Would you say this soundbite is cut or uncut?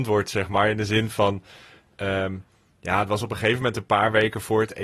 uncut